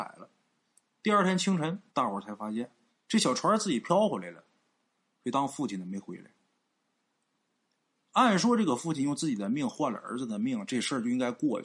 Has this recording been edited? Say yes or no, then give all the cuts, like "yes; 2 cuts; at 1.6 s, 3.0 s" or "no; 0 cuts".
yes; 2 cuts; at 1.9 s, 2.9 s